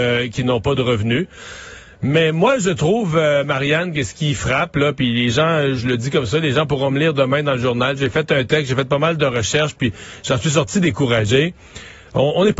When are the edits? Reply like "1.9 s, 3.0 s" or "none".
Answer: 5.8 s

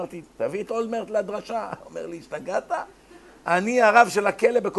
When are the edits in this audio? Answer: none

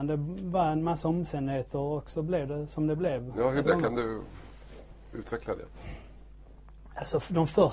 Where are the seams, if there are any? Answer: 3.7 s

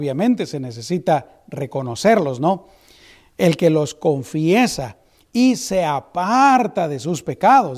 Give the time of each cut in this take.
none

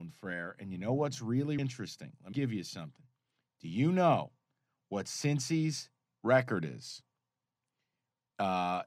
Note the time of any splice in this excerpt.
1.6 s, 2.3 s

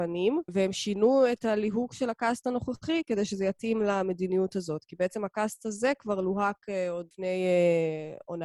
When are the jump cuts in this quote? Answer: none

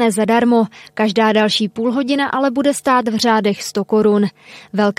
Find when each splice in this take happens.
none

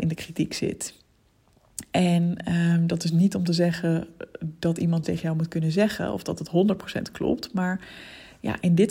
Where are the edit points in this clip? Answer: 5.0 s

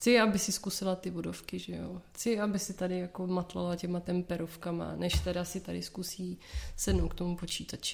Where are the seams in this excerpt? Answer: none

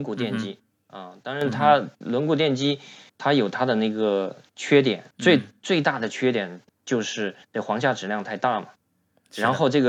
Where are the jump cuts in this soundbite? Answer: 3.1 s, 5.1 s, 6.7 s, 7.4 s

